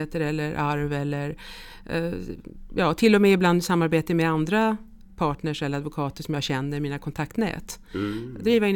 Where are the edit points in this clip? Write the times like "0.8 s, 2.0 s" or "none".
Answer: none